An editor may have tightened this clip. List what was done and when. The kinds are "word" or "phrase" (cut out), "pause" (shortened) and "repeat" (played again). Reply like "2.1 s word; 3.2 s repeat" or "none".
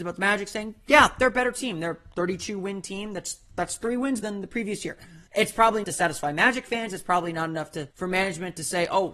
4.2 s word; 5.3 s pause; 5.8 s phrase; 7.9 s pause